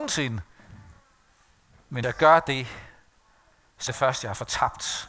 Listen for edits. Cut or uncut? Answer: cut